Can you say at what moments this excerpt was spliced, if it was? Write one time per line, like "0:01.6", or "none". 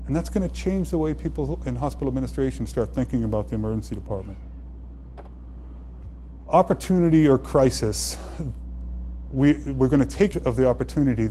0:01.6
0:10.3

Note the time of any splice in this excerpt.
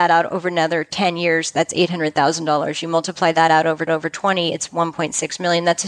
0:03.9

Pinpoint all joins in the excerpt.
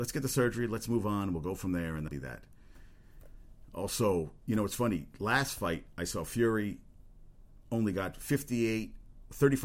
0:02.1

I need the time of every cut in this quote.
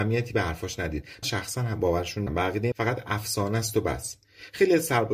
0:01.2
0:02.3
0:02.7

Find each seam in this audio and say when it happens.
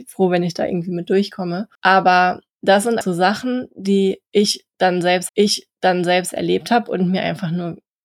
0:01.7
0:03.0
0:05.3

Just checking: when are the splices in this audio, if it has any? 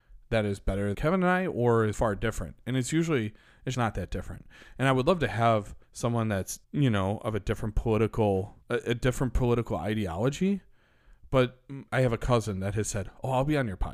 0:00.9
0:01.9
0:03.7
0:05.8
0:06.6
0:08.6
0:11.9

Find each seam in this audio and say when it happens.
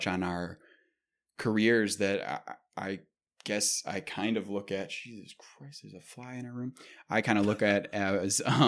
none

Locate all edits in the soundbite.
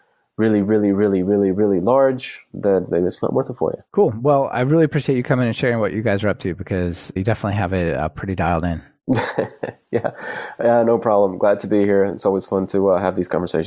none

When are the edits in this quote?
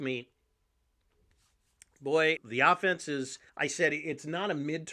0:02.4
0:03.5

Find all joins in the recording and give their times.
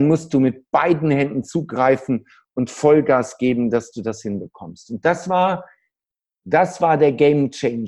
none

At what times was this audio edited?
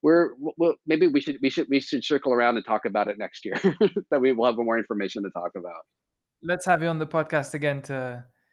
none

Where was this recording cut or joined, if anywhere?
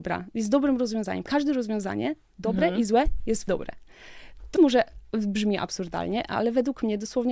0:03.5
0:04.6

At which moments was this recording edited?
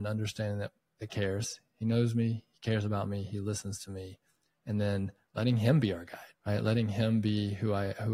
0:01.1
0:06.3

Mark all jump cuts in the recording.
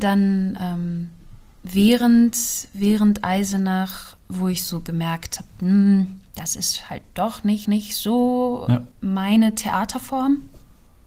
0:04.2
0:06.3
0:07.6
0:08.9

